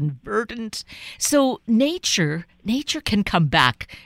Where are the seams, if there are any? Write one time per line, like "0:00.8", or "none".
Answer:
0:02.5